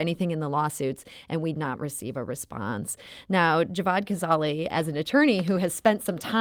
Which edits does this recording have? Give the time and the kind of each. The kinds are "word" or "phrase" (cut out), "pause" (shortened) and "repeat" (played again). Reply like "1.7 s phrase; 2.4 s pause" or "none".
1.5 s word; 4.7 s word